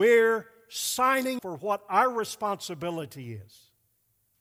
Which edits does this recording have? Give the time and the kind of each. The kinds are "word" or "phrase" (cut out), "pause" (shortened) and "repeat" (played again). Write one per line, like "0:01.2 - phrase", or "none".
0:01.4 - word